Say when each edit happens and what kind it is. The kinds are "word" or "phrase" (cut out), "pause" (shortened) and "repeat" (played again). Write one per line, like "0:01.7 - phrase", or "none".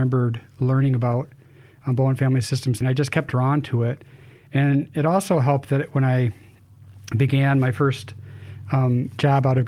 0:02.8 - word
0:03.3 - word